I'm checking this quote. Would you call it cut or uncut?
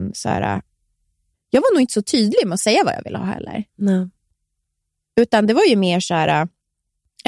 uncut